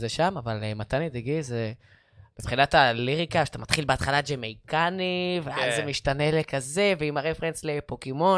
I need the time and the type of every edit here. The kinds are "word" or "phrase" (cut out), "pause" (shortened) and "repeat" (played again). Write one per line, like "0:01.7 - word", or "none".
none